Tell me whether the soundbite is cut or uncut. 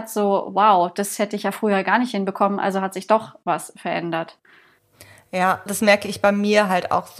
cut